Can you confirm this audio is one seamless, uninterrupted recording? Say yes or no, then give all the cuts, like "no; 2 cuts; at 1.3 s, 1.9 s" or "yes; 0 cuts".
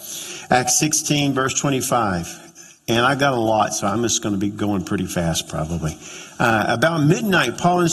yes; 0 cuts